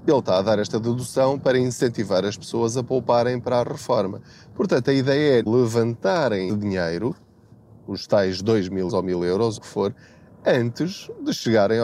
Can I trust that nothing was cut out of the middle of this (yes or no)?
no